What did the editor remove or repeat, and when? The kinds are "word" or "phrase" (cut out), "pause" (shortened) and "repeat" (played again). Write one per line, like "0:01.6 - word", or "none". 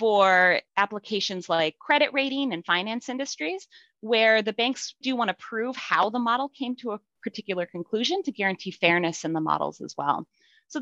0:05.0 - word